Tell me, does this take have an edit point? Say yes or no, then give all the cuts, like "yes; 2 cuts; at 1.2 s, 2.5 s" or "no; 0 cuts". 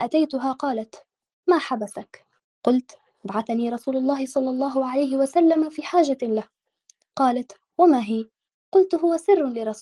no; 0 cuts